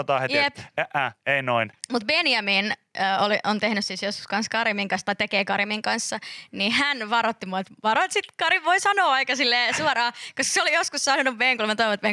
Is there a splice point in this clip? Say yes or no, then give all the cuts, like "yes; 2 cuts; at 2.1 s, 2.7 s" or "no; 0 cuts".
no; 0 cuts